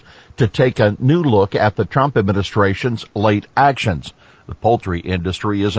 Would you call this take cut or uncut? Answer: uncut